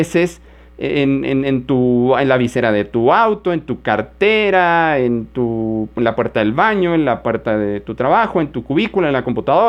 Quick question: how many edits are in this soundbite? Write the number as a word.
zero